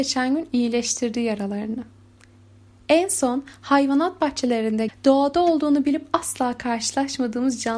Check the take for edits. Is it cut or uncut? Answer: cut